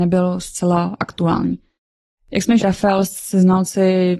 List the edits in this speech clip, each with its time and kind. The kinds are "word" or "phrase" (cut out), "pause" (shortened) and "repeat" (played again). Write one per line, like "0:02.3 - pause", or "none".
0:02.6 - word